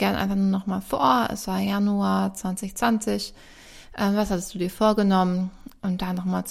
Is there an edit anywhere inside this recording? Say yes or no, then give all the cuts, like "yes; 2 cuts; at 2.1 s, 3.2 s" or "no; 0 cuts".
no; 0 cuts